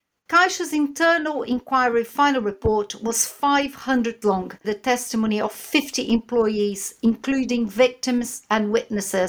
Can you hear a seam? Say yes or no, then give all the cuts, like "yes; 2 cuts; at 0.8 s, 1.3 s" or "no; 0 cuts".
yes; 2 cuts; at 4.2 s, 4.6 s